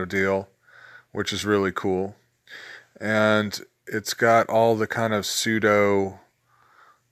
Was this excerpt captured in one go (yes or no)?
yes